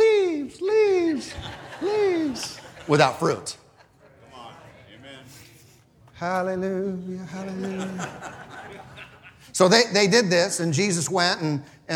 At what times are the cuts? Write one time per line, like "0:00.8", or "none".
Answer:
none